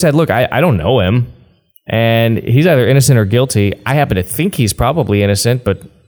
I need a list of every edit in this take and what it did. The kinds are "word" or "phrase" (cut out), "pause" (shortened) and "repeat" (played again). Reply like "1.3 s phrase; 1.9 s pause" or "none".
none